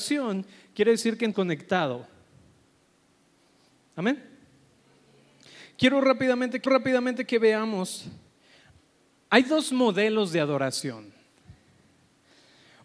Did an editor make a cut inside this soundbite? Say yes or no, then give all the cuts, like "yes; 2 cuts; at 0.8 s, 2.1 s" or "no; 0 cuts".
yes; 2 cuts; at 1.3 s, 6.7 s